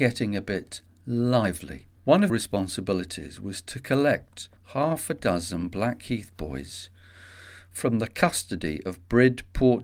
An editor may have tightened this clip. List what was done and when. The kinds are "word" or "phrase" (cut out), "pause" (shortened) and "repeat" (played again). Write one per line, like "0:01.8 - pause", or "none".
0:02.0 - pause
0:02.3 - phrase
0:04.6 - pause